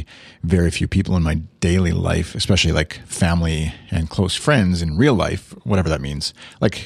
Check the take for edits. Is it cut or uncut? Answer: uncut